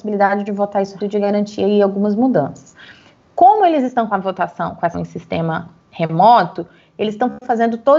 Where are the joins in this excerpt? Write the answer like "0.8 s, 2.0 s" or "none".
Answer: 1.0 s, 4.1 s, 4.9 s